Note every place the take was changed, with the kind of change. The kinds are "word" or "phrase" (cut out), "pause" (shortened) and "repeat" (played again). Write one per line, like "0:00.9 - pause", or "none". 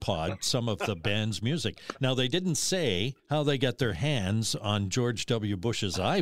0:03.2 - pause